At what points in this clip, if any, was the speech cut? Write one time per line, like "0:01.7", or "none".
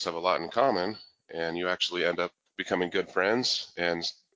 none